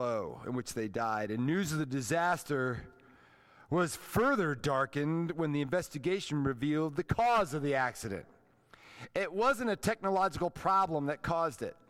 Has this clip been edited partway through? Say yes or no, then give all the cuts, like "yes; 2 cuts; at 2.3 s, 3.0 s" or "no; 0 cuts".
no; 0 cuts